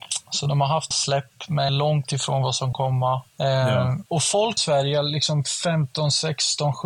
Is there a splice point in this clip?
yes; 6 cuts; at 0.9 s, 1.7 s, 2.7 s, 3.3 s, 4.1 s, 4.6 s

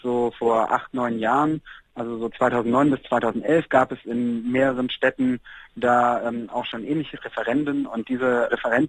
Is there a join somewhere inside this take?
no; 0 cuts

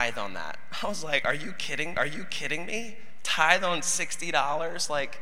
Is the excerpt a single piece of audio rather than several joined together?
no; 1 cut; at 1.9 s

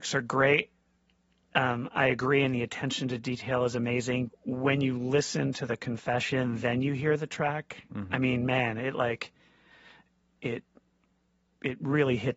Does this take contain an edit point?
yes; 1 cut; at 4.3 s

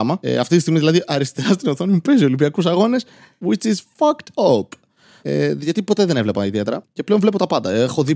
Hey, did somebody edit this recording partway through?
no; 0 cuts

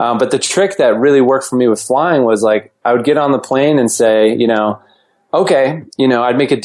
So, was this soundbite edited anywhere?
no; 0 cuts

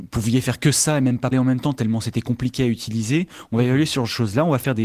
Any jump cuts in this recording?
yes; 1 cut; at 1.3 s

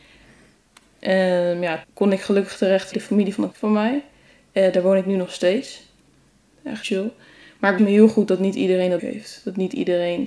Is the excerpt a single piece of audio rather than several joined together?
no; 6 cuts; at 1.8 s, 2.9 s, 3.5 s, 6.8 s, 7.8 s, 9.0 s

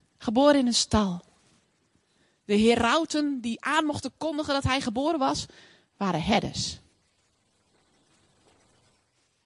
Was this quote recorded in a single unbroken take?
yes; 0 cuts

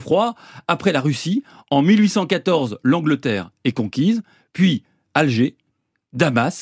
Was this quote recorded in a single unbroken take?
yes; 0 cuts

